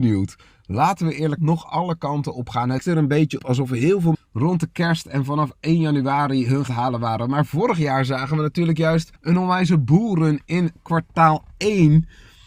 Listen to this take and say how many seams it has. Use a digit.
6